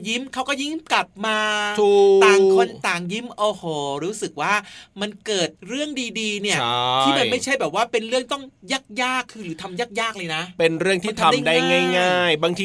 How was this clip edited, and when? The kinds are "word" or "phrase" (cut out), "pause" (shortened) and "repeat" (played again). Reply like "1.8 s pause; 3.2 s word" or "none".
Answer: 5.6 s pause